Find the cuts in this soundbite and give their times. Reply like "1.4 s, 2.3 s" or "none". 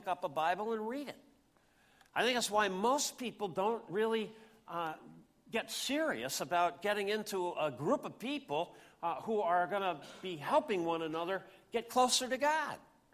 none